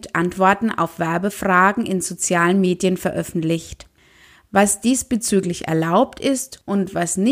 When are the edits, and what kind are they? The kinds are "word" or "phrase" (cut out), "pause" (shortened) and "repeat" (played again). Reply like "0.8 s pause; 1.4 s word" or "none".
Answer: none